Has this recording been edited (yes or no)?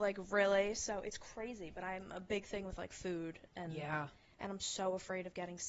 no